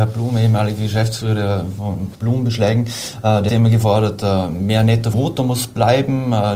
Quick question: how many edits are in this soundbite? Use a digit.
3